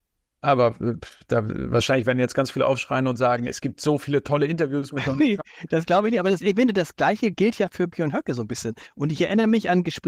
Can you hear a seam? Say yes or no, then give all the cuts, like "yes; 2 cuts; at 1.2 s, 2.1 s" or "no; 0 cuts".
no; 0 cuts